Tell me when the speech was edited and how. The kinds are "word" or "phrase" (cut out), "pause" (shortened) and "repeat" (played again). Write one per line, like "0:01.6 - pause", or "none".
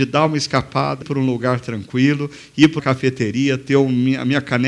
0:01.0 - word
0:02.8 - word